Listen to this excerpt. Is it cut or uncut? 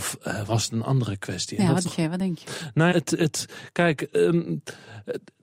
cut